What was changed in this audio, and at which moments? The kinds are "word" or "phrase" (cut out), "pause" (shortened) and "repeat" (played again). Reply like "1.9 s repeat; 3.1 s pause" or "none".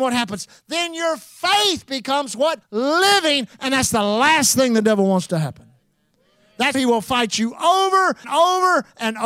2.6 s pause; 6.7 s word; 8.2 s word